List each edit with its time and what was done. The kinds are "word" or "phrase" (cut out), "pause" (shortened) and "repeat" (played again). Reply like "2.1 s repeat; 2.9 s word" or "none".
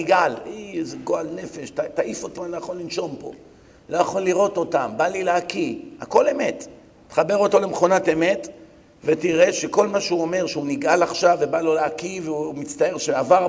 2.4 s word